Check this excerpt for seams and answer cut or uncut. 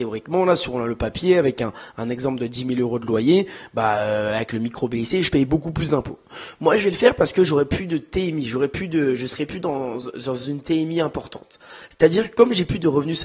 uncut